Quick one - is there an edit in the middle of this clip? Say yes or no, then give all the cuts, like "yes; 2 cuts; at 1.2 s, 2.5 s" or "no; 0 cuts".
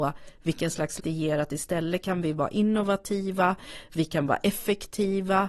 yes; 1 cut; at 1.0 s